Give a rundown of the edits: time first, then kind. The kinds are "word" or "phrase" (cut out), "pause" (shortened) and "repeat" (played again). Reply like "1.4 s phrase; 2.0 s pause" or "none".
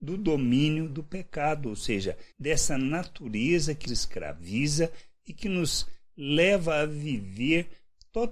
2.3 s pause; 3.9 s word